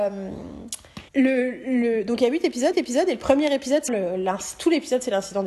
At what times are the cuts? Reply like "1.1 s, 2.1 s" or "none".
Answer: 1.1 s, 2.7 s, 3.9 s